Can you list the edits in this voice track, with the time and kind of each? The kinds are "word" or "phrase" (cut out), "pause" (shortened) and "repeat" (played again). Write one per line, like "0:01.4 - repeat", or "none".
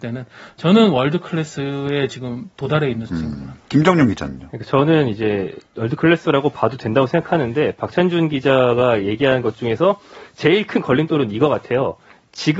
0:03.1 - word
0:03.6 - pause